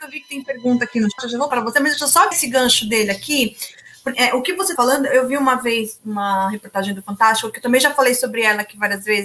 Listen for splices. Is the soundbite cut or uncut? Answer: cut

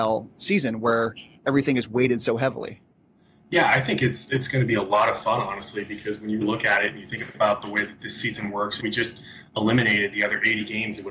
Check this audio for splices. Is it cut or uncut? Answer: cut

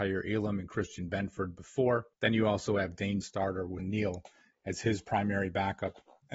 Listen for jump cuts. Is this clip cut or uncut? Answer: cut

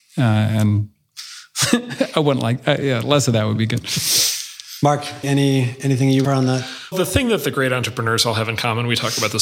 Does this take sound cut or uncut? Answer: cut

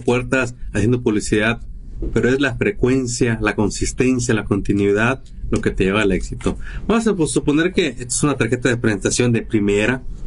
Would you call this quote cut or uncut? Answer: uncut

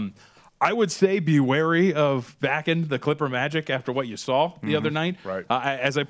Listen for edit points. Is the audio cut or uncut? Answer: uncut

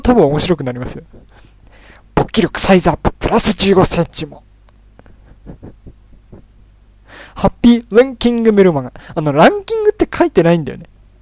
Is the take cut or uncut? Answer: uncut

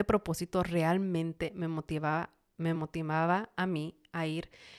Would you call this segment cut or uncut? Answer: uncut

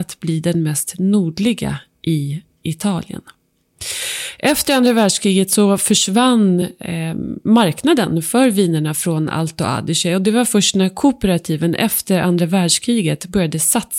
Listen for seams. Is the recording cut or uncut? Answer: uncut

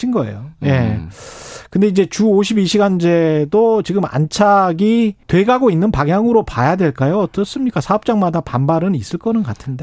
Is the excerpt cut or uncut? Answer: cut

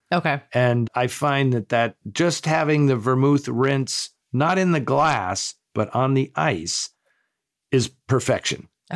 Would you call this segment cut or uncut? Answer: uncut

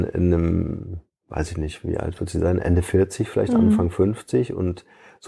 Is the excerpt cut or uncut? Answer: uncut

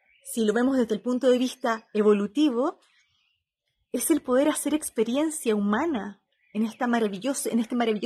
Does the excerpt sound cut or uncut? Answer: uncut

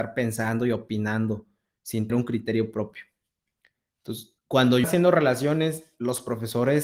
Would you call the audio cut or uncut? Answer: cut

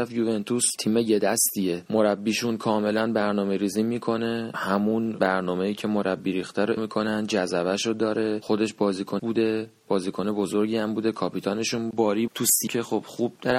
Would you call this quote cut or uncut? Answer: cut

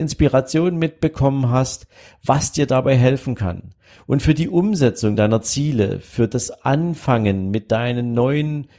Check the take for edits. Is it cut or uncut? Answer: uncut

